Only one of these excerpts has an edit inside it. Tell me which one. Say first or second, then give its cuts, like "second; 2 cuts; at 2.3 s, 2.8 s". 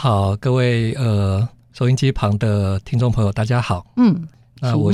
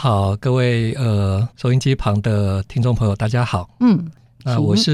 second; 1 cut; at 1.5 s